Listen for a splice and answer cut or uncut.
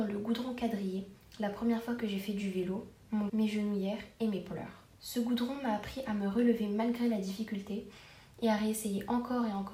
cut